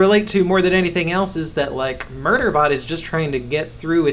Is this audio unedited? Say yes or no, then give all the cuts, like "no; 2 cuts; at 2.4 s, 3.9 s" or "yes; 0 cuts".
yes; 0 cuts